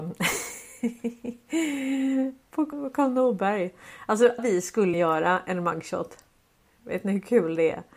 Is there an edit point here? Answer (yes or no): yes